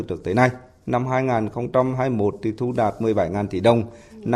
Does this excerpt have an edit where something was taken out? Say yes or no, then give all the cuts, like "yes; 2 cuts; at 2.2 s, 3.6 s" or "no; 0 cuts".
no; 0 cuts